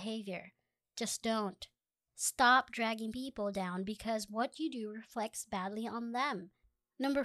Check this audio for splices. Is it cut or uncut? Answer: uncut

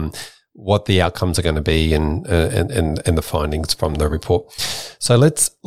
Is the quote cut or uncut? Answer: uncut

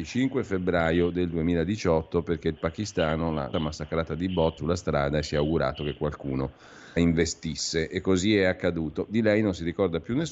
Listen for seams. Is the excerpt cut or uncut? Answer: cut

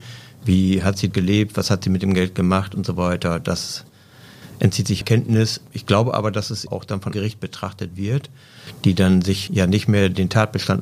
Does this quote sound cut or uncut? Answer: cut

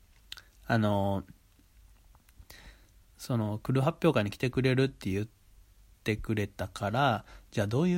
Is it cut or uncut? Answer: uncut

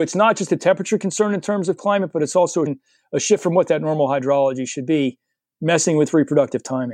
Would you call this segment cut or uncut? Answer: cut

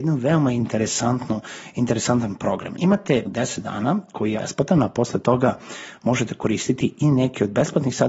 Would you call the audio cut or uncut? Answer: cut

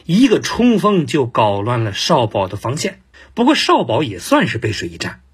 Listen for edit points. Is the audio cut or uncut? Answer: cut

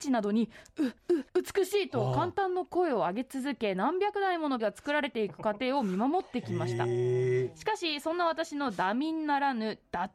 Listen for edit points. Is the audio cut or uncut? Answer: cut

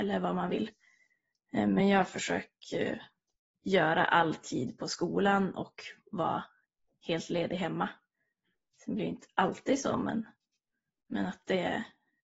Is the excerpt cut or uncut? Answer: uncut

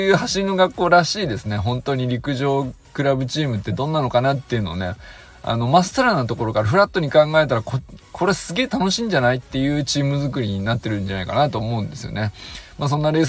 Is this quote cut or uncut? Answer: uncut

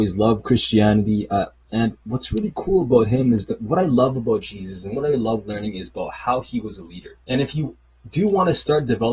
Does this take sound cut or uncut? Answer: cut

